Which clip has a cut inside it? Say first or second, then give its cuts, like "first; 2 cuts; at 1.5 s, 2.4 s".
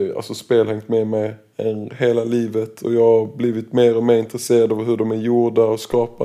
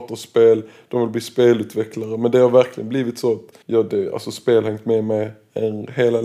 second; 1 cut; at 3.6 s